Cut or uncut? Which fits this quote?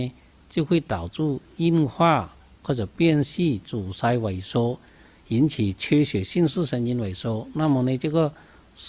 uncut